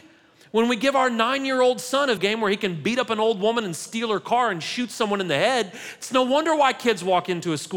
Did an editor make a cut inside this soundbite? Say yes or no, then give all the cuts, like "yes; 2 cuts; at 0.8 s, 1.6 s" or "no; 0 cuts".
yes; 1 cut; at 2.2 s